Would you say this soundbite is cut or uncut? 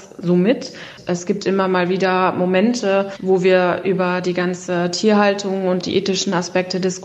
cut